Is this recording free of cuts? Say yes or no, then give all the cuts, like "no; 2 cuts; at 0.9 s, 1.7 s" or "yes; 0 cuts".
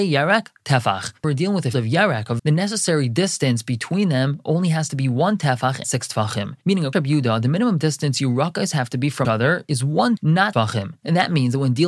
no; 8 cuts; at 1.2 s, 1.7 s, 2.4 s, 5.8 s, 6.9 s, 9.2 s, 10.2 s, 10.5 s